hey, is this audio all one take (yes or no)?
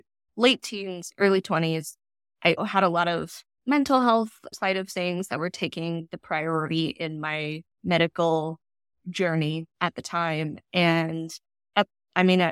no